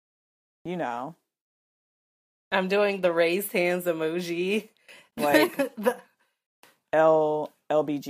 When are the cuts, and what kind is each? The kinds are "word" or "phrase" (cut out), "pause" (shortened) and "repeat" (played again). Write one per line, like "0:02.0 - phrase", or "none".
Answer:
none